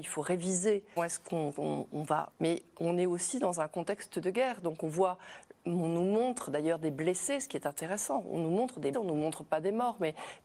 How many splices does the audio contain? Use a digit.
3